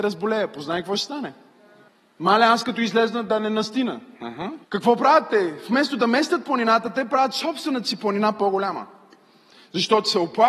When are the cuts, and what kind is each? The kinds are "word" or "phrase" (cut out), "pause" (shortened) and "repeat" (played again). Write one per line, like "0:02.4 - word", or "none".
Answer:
0:01.9 - pause
0:04.6 - pause